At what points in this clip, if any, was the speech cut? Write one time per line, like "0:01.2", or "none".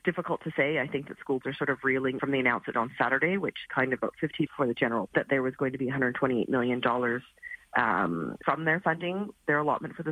0:01.4
0:02.2
0:02.7
0:03.7
0:04.0
0:04.5
0:05.1
0:08.4